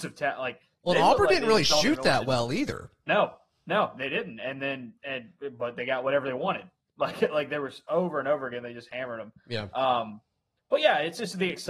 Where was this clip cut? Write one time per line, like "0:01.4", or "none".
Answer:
none